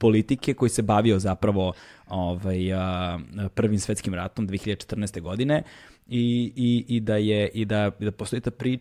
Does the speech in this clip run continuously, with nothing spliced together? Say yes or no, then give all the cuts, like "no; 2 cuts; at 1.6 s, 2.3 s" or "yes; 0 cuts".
yes; 0 cuts